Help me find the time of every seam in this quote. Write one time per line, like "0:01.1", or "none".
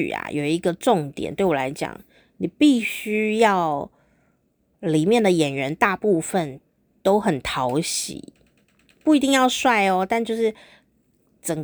none